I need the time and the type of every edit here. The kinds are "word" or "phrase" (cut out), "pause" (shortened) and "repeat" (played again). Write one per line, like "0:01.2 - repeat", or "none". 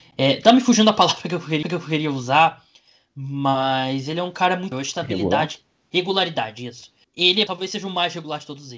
0:01.6 - repeat
0:04.7 - word
0:05.6 - word
0:07.0 - pause
0:07.5 - word